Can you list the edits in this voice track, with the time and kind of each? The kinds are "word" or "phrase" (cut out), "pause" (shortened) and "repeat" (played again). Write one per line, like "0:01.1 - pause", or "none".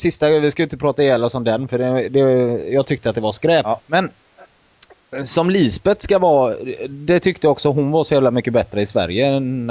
0:03.8 - pause